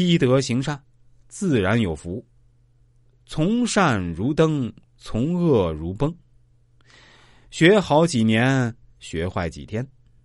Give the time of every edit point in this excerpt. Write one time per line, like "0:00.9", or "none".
none